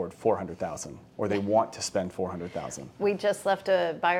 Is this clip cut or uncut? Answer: cut